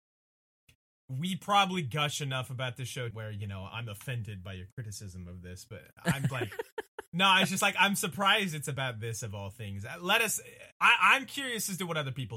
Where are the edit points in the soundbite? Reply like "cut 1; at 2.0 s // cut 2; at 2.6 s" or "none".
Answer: cut 1; at 3.1 s // cut 2; at 3.7 s // cut 3; at 6.3 s // cut 4; at 10.7 s